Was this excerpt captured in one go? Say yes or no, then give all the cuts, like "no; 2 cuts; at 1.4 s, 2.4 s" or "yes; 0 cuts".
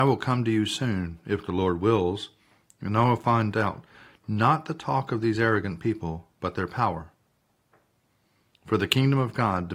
yes; 0 cuts